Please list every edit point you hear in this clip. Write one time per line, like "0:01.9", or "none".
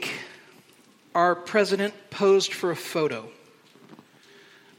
none